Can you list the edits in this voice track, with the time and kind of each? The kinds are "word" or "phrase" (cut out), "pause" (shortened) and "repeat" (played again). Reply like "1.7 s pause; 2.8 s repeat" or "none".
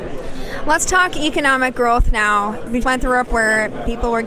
2.8 s word; 3.3 s word